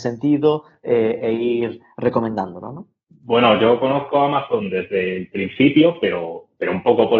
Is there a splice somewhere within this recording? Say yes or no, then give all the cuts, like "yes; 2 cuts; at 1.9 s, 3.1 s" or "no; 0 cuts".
no; 0 cuts